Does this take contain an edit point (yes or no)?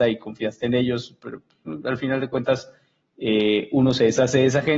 no